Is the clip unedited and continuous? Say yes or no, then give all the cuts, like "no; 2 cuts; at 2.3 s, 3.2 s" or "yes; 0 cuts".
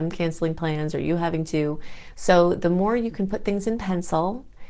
yes; 0 cuts